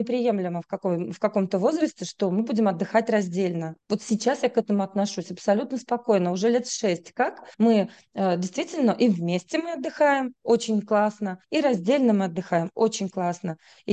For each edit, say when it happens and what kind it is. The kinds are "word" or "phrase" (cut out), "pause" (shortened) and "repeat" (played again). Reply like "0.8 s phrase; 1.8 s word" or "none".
3.8 s pause; 7.5 s pause; 11.4 s pause